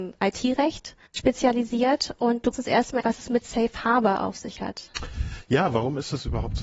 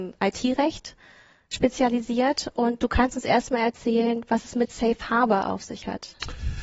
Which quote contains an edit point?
first; 3 cuts; at 1.1 s, 2.5 s, 3.0 s

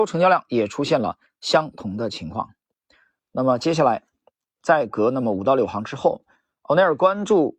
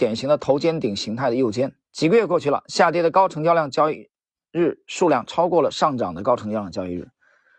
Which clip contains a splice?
second; 1 cut; at 1.8 s

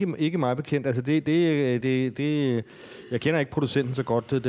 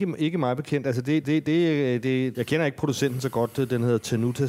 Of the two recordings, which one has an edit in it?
second; 2 cuts; at 1.2 s, 2.3 s

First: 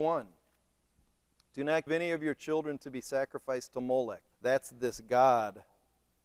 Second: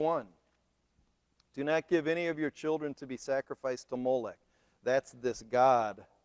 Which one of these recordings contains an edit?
first; 2 cuts; at 1.9 s, 4.3 s

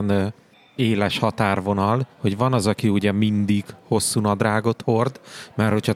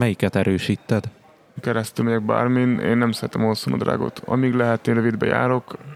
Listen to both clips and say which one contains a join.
first; 1 cut; at 2.1 s

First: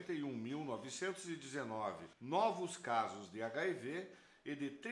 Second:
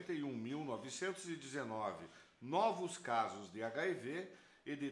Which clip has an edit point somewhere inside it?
first; 1 cut; at 2.1 s

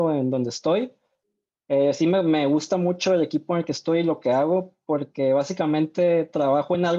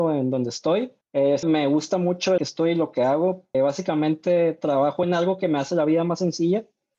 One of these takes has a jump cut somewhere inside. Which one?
second; 4 cuts; at 1.0 s, 1.4 s, 2.4 s, 3.5 s

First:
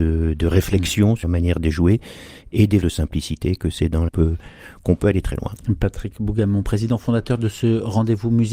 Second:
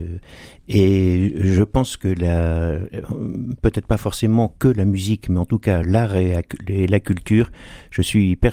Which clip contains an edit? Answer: first; 4 cuts; at 1.2 s, 2.8 s, 3.6 s, 4.1 s

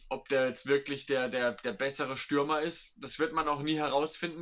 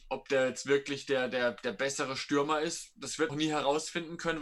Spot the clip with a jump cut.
second; 1 cut; at 3.3 s

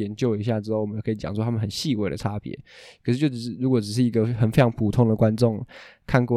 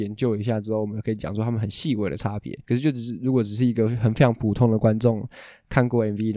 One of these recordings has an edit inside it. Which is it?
second; 1 cut; at 2.6 s

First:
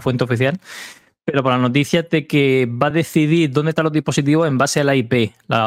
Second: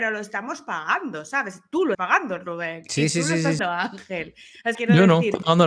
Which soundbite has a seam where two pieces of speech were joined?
second; 3 cuts; at 1.9 s, 3.6 s, 4.7 s

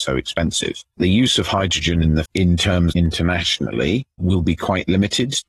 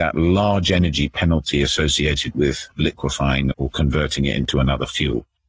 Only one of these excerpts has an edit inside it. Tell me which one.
first; 3 cuts; at 1.0 s, 2.2 s, 2.9 s

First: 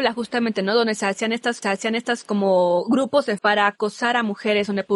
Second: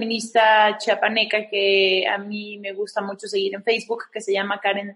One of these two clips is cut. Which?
first; 2 cuts; at 1.6 s, 3.4 s

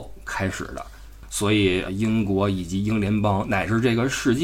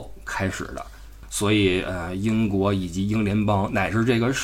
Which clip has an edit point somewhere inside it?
first; 1 cut; at 1.9 s

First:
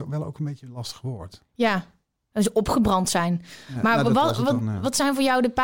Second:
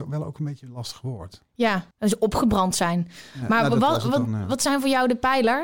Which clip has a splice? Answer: second; 1 cut; at 1.9 s

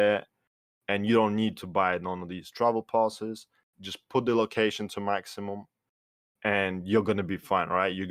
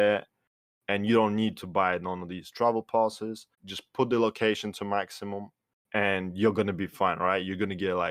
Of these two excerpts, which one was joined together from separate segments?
second; 2 cuts; at 3.5 s, 5.8 s

